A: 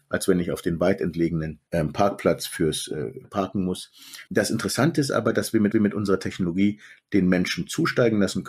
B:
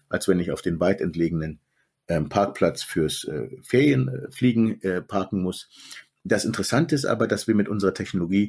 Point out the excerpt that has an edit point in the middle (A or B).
A